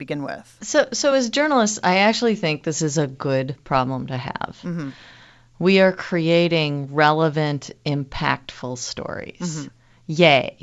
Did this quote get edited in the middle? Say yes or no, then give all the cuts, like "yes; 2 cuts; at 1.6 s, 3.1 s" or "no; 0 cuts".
no; 0 cuts